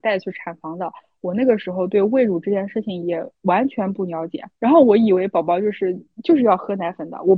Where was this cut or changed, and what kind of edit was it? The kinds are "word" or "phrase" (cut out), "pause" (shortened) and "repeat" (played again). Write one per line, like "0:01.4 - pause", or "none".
0:04.5 - pause